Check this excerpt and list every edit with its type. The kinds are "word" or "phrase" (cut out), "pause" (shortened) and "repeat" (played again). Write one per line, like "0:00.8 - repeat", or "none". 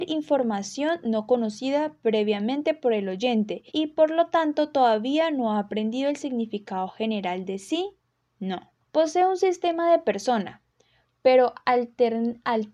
0:03.7 - pause
0:08.8 - pause